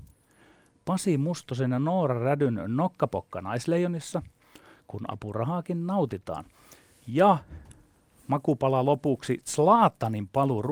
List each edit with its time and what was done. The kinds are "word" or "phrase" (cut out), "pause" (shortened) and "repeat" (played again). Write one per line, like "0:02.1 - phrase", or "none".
none